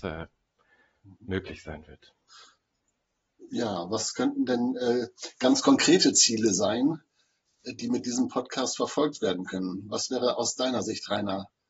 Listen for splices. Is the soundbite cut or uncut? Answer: uncut